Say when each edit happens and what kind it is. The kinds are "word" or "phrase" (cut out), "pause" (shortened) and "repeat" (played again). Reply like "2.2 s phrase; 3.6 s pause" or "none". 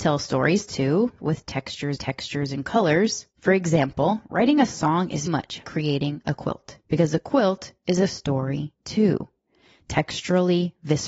1.2 s word; 2.0 s repeat; 3.3 s pause; 5.3 s word; 5.6 s word; 6.8 s pause